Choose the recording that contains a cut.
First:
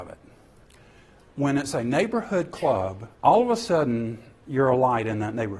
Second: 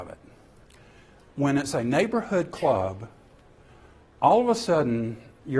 first; 1 cut; at 3.1 s

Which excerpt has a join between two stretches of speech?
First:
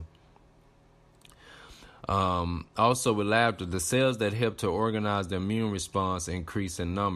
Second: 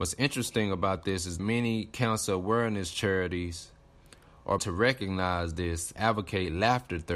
second; 3 cuts; at 1.4 s, 4.6 s, 6.0 s

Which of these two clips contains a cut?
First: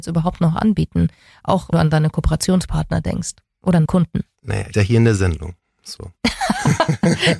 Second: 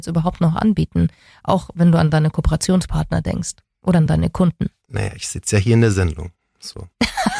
first; 3 cuts; at 1.7 s, 3.9 s, 4.7 s

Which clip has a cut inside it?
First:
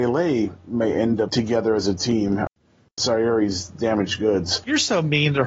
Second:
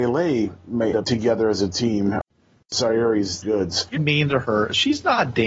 second; 3 cuts; at 0.9 s, 3.4 s, 4.0 s

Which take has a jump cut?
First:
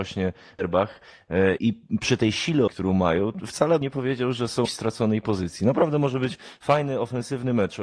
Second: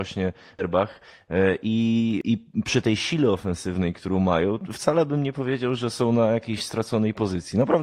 first; 4 cuts; at 1.6 s, 2.7 s, 3.8 s, 4.7 s

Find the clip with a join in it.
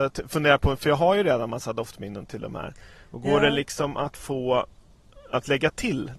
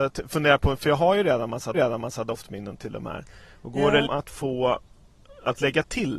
second; 2 cuts; at 1.7 s, 4.1 s

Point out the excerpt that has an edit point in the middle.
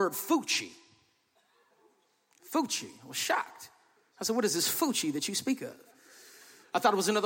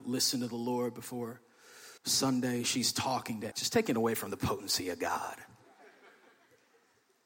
second; 2 cuts; at 2.0 s, 3.5 s

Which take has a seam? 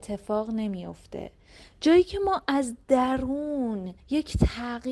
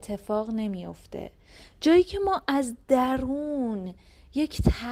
first; 1 cut; at 4.0 s

